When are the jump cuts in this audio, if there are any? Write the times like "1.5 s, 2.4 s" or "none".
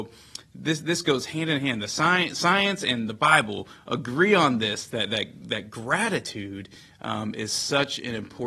none